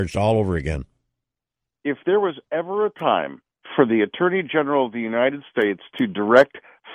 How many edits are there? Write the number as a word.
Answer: zero